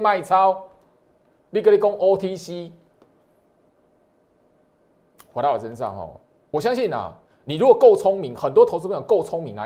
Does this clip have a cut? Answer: no; 0 cuts

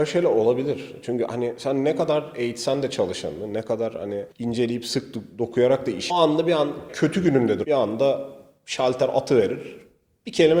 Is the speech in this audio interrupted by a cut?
yes; 4 cuts; at 4.3 s, 6.1 s, 6.9 s, 7.6 s

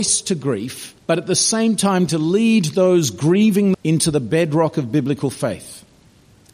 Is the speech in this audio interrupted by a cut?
yes; 3 cuts; at 1.0 s, 2.1 s, 3.7 s

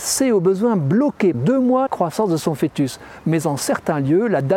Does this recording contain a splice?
yes; 2 cuts; at 1.3 s, 1.9 s

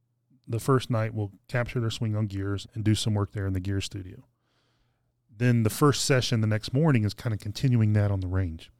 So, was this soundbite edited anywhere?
yes; 1 cut; at 2.6 s

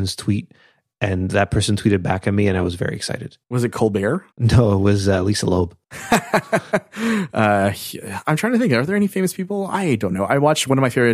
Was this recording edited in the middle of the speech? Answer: yes; 3 cuts; at 3.4 s, 4.3 s, 5.8 s

